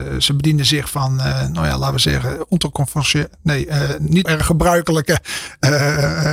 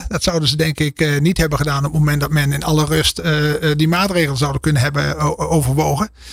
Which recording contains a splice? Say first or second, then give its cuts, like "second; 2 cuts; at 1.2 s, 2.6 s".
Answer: first; 1 cut; at 4.2 s